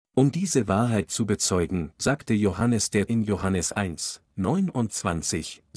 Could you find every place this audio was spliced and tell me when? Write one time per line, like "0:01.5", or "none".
0:03.1